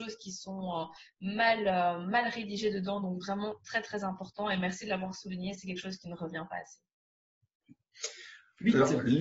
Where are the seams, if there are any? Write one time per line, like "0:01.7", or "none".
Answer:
none